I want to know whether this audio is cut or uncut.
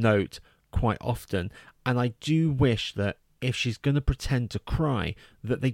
uncut